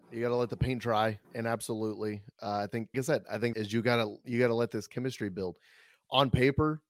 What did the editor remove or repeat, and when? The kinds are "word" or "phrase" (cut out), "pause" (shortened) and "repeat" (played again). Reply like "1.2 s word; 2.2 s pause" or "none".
1.2 s pause; 2.9 s word; 3.5 s phrase